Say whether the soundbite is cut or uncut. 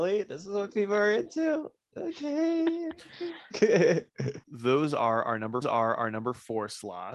cut